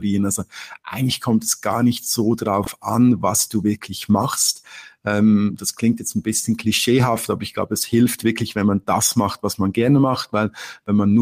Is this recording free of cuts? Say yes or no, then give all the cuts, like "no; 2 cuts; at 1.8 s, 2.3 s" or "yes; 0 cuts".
yes; 0 cuts